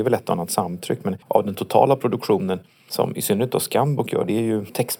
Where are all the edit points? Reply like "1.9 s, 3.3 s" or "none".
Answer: 1.2 s